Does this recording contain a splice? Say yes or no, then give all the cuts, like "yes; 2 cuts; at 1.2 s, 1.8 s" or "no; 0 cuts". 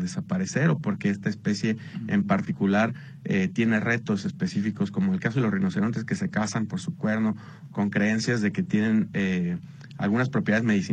no; 0 cuts